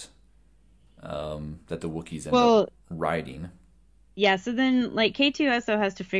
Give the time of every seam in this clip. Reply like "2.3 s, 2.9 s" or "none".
none